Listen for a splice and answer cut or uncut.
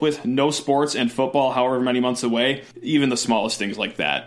cut